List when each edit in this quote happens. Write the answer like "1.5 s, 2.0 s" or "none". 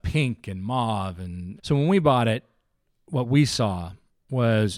1.6 s